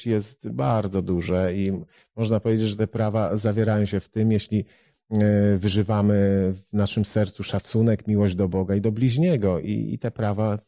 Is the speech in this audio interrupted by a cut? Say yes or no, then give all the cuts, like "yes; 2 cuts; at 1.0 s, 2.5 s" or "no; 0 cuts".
no; 0 cuts